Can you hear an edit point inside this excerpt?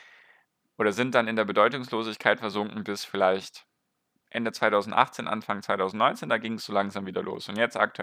no; 0 cuts

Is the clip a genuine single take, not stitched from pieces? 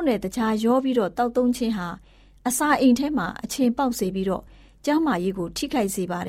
yes; 0 cuts

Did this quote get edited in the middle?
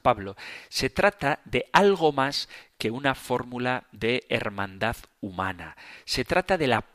no; 0 cuts

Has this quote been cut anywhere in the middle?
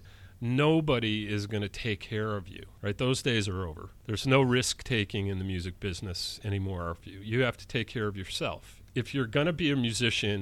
no; 0 cuts

